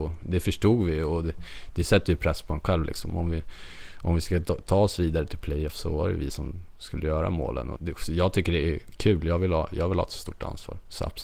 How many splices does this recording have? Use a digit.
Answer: 1